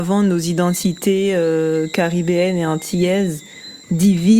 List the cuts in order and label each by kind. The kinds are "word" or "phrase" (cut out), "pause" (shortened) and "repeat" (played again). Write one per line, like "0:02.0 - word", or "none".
none